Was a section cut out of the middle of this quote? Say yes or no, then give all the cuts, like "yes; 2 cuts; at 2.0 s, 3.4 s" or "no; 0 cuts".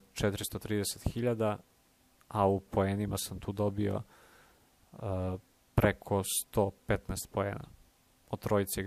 no; 0 cuts